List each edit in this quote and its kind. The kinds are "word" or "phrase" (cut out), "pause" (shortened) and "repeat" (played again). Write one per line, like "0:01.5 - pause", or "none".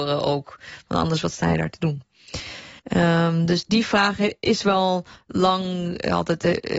0:02.8 - pause
0:03.7 - word

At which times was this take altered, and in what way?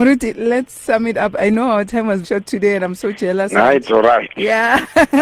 0:02.2 - word

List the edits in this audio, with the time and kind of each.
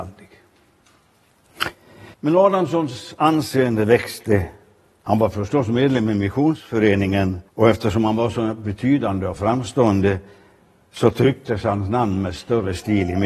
0:02.1 - pause
0:07.5 - pause

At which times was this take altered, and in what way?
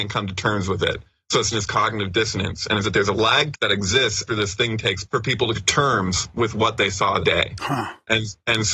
0:01.5 - word
0:02.8 - word
0:03.5 - word
0:04.3 - word
0:05.1 - word
0:05.5 - word
0:07.2 - word

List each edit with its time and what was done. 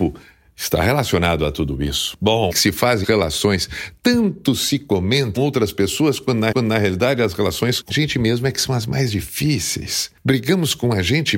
0:02.5 - word
0:03.0 - word
0:05.4 - phrase
0:06.5 - repeat
0:07.9 - word

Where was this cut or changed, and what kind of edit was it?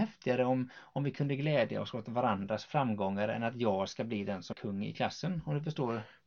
0:04.5 - word

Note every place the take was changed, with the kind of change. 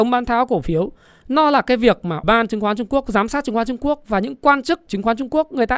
0:02.2 - word
0:04.9 - word

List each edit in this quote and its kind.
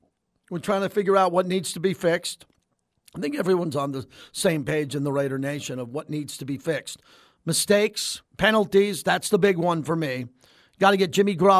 0:08.3 - pause

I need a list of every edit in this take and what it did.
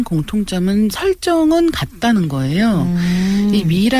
0:00.9 - word

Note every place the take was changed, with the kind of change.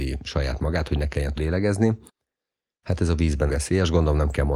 0:01.4 - word
0:03.5 - word

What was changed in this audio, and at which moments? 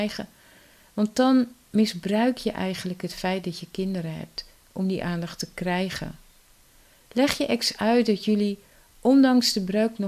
none

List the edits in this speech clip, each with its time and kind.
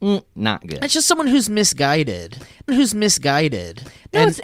0:02.7 - repeat

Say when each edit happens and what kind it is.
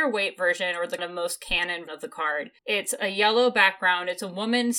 0:01.0 - word
0:01.9 - word
0:02.6 - pause

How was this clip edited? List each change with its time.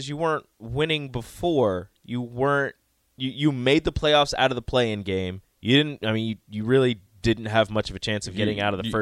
0:05.4 - pause

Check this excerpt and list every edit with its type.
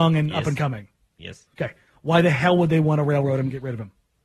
0:01.5 - pause

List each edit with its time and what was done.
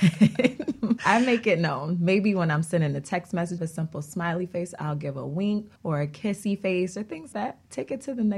0:01.0 - word
0:03.6 - phrase
0:05.8 - pause
0:07.3 - word

